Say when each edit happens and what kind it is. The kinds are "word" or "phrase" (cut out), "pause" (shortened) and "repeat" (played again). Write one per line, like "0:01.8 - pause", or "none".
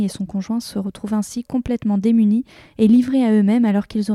none

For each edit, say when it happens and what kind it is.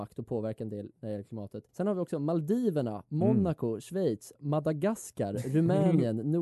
0:01.7 - pause
0:04.4 - word

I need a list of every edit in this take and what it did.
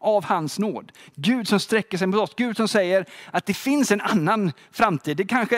none

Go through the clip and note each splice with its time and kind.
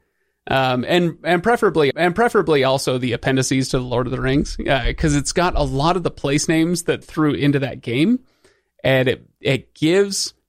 0:01.9 - repeat
0:07.0 - word

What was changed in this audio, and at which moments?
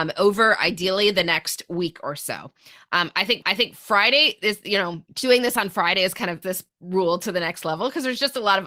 0:03.4 - repeat
0:05.1 - pause
0:06.4 - word

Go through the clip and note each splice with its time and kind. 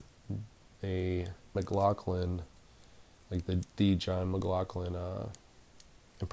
0:01.5 - word

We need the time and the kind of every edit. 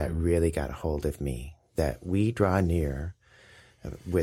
none

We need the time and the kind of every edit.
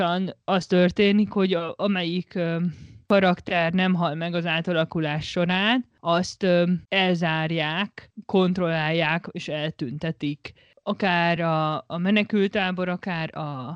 none

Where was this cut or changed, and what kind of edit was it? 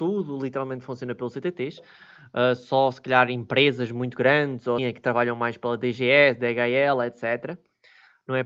0:04.8 - word

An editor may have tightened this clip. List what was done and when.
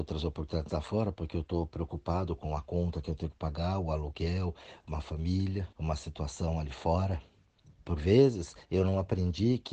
0:05.7 - pause
0:07.6 - pause

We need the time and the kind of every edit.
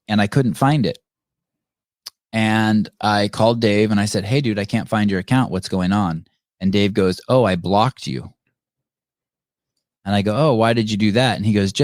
none

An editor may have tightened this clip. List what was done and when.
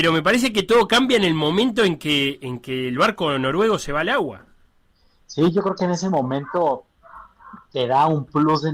0:04.7 - pause

